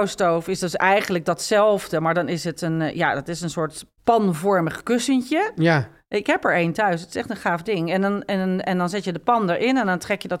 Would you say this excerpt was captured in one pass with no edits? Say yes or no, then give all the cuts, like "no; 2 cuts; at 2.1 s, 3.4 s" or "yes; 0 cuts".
yes; 0 cuts